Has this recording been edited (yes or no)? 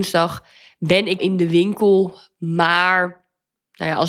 yes